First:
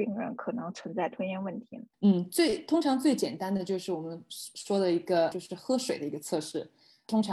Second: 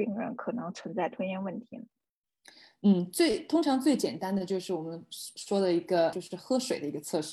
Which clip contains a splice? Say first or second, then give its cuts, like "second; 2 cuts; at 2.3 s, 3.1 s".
first; 1 cut; at 1.9 s